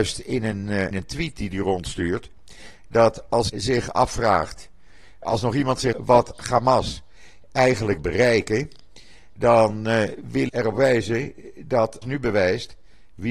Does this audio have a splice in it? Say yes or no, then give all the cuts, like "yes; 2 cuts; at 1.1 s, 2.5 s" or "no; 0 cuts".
yes; 7 cuts; at 0.9 s, 3.5 s, 5.2 s, 5.9 s, 8.0 s, 10.5 s, 12.0 s